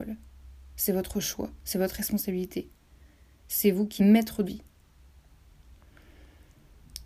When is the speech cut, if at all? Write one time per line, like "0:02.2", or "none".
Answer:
0:04.0
0:04.4